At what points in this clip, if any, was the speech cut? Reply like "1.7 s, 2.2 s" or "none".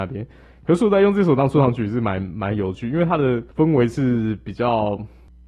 3.5 s